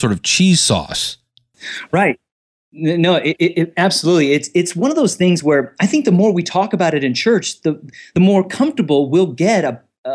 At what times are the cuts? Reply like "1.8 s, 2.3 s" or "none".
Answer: none